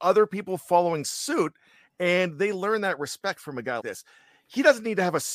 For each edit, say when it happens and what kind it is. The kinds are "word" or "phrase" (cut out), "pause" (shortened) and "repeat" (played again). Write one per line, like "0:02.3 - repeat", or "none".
0:03.8 - word